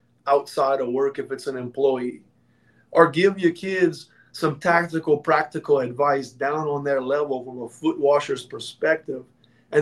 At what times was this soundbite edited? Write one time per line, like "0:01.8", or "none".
none